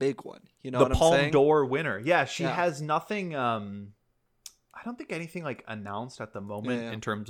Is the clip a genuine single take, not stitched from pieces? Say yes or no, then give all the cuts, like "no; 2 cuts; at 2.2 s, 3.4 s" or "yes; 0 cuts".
yes; 0 cuts